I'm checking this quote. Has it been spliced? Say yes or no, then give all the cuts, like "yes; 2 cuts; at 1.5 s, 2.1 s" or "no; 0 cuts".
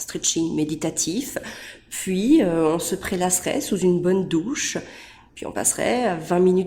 no; 0 cuts